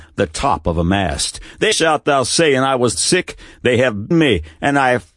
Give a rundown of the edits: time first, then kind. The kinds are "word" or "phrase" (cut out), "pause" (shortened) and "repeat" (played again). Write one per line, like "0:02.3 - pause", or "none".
0:01.7 - phrase
0:02.9 - word
0:04.1 - word